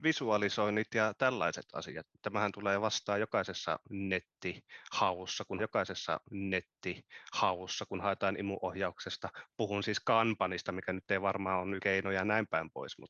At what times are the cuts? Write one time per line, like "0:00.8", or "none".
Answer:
0:05.6
0:11.8